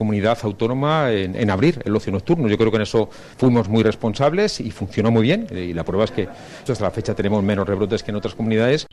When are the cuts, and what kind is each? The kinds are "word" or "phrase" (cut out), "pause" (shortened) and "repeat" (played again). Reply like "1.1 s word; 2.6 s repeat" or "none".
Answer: 3.3 s pause; 6.7 s word